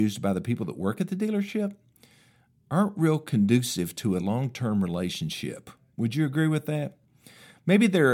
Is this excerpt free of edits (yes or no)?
yes